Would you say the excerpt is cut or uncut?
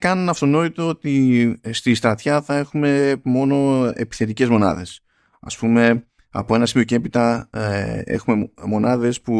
uncut